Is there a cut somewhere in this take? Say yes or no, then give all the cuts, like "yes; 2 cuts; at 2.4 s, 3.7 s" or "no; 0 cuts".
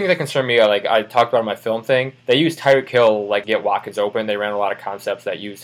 yes; 2 cuts; at 2.2 s, 3.4 s